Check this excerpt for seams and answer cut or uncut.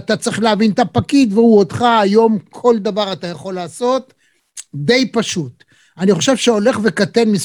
uncut